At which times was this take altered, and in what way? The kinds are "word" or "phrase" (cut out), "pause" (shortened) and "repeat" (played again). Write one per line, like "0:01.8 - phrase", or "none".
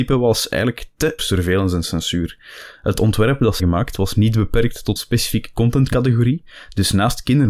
0:01.2 - phrase
0:03.6 - word
0:05.0 - word

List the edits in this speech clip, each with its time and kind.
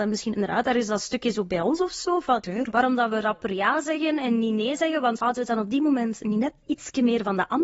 none

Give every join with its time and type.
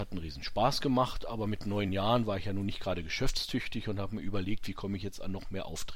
none

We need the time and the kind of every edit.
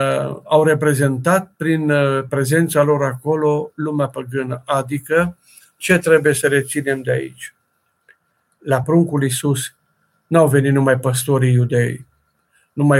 none

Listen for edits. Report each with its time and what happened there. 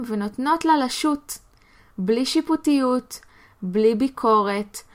none

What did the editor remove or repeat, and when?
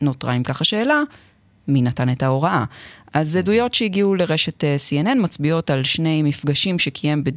none

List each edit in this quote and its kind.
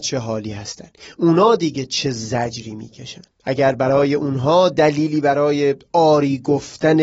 0:03.3 - pause

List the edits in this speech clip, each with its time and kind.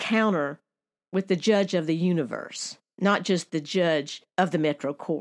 0:04.3 - pause

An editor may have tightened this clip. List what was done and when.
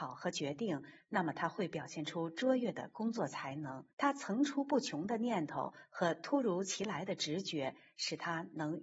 0:03.9 - pause

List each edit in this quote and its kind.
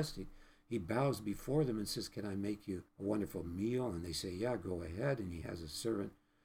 0:02.9 - pause

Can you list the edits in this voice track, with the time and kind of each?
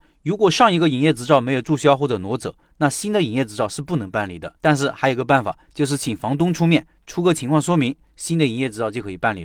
0:04.6 - pause

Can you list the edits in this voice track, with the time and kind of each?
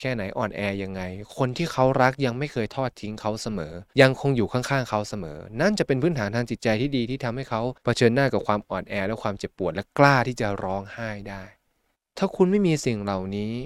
0:03.9 - pause
0:07.8 - pause
0:11.9 - pause

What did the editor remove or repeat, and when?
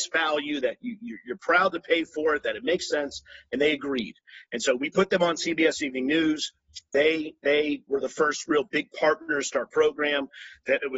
0:07.9 - word
0:09.7 - phrase

